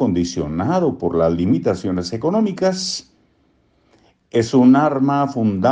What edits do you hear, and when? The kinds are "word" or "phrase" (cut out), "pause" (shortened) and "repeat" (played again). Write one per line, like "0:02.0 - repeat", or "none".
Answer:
none